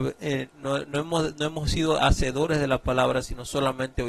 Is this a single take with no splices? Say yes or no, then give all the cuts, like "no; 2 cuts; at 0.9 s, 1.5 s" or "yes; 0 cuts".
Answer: yes; 0 cuts